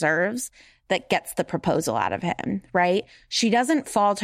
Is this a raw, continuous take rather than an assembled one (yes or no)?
yes